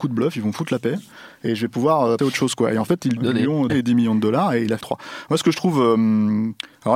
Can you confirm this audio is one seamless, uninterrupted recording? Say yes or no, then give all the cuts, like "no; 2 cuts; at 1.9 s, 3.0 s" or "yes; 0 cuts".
no; 4 cuts; at 2.2 s, 3.2 s, 3.7 s, 4.8 s